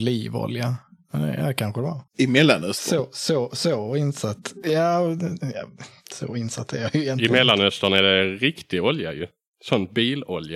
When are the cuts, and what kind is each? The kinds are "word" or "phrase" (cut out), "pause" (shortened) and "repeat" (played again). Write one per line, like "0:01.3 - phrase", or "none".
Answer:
0:02.1 - pause